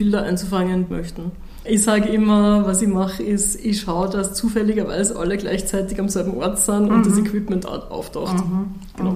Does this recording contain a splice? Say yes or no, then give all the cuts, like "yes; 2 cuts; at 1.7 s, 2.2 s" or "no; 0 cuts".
yes; 1 cut; at 0.9 s